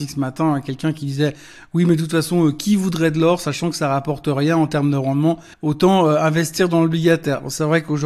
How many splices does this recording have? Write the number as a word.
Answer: one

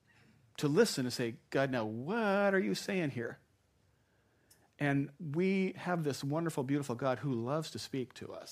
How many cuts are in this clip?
one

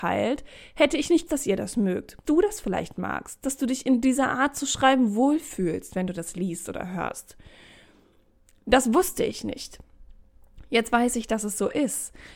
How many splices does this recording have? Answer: two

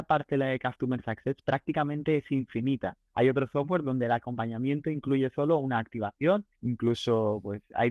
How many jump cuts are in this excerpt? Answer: two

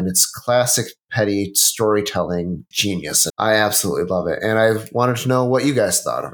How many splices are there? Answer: two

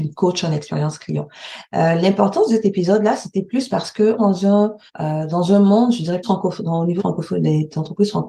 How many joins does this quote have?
four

